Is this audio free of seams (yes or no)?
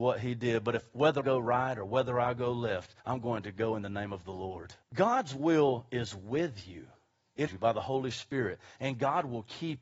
no